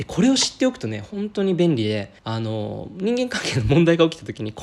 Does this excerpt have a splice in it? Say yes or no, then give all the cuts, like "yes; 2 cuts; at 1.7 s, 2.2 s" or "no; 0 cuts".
yes; 1 cut; at 2.2 s